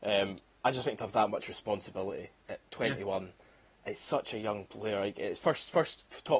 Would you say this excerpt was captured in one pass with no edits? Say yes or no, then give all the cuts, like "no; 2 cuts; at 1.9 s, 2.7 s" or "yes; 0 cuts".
yes; 0 cuts